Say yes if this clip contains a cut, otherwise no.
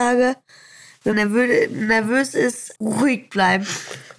yes